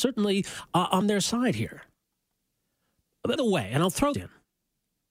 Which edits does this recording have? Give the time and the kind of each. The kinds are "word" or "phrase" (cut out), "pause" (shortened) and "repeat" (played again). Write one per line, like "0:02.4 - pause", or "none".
0:01.0 - word
0:03.4 - word
0:04.1 - word